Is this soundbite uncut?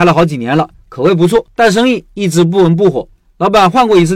yes; 0 cuts

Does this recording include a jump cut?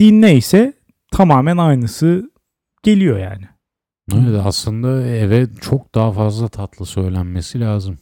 no; 0 cuts

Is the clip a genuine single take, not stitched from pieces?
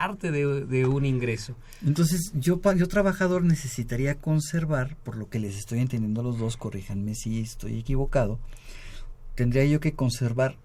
yes; 0 cuts

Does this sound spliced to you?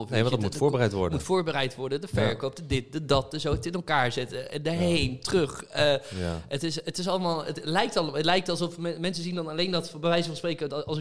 no; 0 cuts

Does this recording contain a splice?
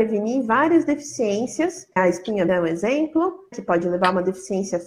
yes; 3 cuts; at 2.0 s, 2.5 s, 3.5 s

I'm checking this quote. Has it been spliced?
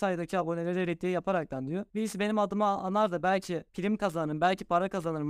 yes; 2 cuts; at 1.9 s, 3.7 s

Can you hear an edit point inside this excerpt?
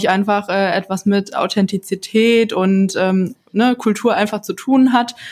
no; 0 cuts

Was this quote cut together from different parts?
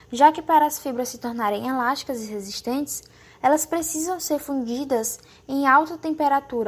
no; 0 cuts

